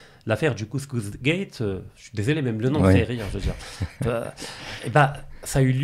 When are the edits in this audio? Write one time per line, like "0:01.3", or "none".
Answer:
0:04.8